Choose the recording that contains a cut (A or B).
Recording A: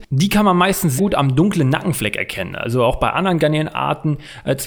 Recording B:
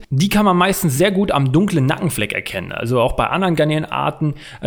A